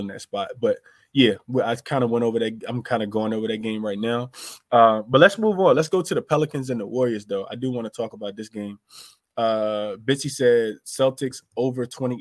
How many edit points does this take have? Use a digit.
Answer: 0